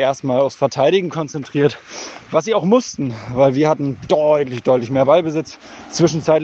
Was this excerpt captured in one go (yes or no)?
yes